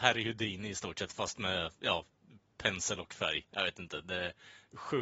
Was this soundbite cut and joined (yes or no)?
yes